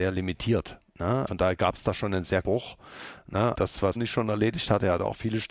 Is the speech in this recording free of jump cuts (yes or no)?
no